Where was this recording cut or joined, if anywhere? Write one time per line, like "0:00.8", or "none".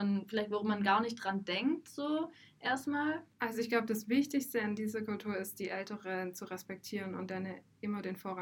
0:03.3